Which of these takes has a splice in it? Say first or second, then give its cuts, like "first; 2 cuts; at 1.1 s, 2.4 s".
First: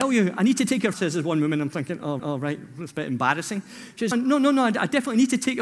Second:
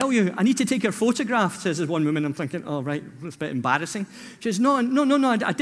first; 3 cuts; at 0.9 s, 2.2 s, 4.1 s